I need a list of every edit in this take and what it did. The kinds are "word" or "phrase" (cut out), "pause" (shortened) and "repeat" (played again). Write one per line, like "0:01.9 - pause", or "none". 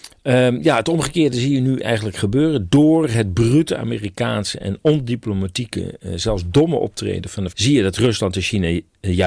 0:07.5 - phrase